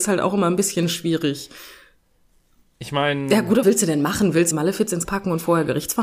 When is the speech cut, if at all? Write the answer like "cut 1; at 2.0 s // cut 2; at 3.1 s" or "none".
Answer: cut 1; at 3.6 s // cut 2; at 4.5 s // cut 3; at 5.0 s